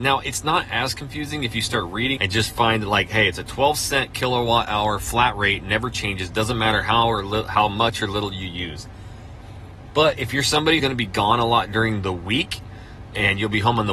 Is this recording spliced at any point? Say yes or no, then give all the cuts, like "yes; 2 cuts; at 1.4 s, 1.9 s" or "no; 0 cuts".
yes; 2 cuts; at 2.2 s, 10.8 s